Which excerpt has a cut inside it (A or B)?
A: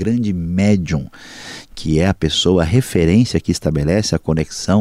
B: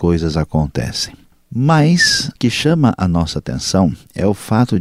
B